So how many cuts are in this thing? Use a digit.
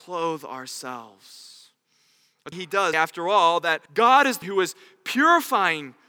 4